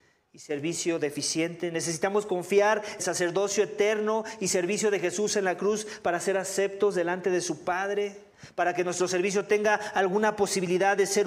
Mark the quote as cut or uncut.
cut